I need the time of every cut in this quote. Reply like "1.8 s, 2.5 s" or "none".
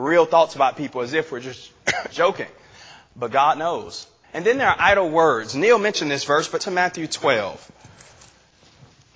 2.1 s, 4.2 s, 6.6 s